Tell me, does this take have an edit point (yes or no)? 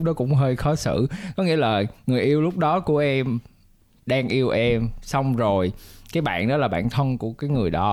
no